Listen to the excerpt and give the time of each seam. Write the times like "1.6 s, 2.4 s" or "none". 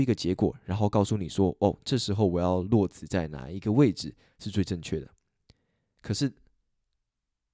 none